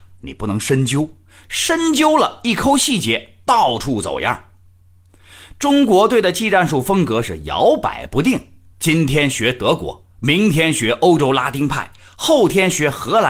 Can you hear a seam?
no; 0 cuts

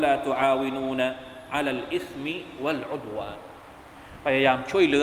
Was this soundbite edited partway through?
no; 0 cuts

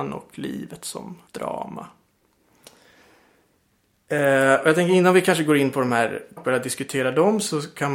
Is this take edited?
yes; 2 cuts; at 1.3 s, 6.4 s

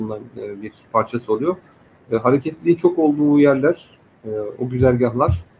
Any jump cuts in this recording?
no; 0 cuts

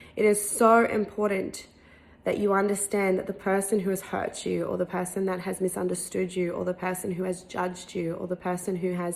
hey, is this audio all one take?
yes; 0 cuts

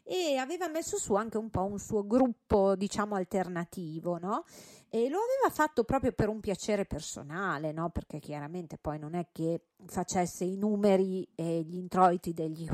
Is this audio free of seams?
yes; 0 cuts

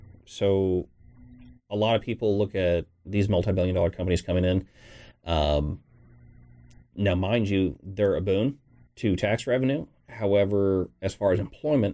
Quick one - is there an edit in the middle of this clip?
no; 0 cuts

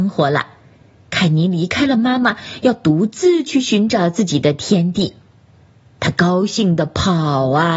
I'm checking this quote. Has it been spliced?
no; 0 cuts

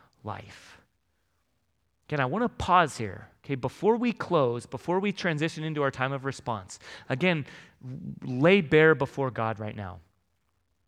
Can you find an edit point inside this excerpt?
no; 0 cuts

